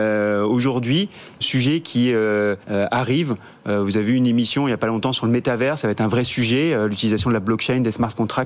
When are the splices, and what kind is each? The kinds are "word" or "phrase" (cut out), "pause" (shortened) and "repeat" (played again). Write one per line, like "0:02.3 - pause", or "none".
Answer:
0:01.4 - phrase
0:02.6 - pause